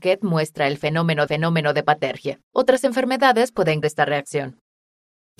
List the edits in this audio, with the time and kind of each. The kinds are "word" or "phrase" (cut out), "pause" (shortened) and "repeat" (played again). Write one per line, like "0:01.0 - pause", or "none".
0:01.3 - repeat
0:02.4 - pause
0:03.8 - word